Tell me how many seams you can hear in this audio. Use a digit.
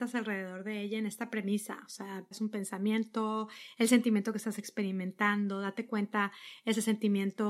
1